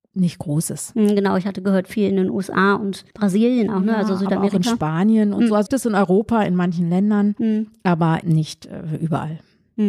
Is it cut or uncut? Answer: cut